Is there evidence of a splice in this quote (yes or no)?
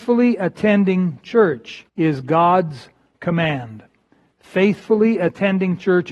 yes